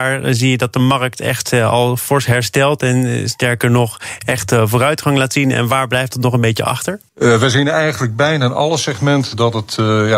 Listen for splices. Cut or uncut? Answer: cut